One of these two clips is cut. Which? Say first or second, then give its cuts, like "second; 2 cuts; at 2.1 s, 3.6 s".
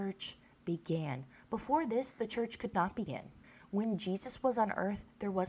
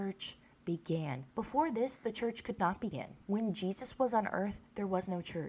second; 2 cuts; at 1.3 s, 3.2 s